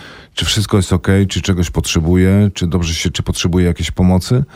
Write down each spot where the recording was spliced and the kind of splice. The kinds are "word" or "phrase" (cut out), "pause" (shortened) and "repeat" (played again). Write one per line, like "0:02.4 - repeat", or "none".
0:03.1 - word